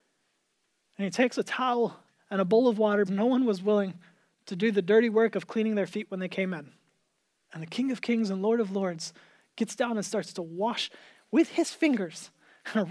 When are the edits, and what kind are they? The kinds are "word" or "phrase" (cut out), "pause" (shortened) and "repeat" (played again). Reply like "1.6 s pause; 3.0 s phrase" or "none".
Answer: 3.1 s word; 7.2 s pause